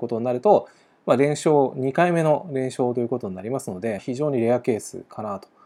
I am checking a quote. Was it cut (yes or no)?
yes